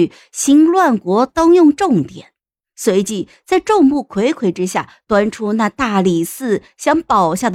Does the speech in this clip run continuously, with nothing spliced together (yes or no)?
yes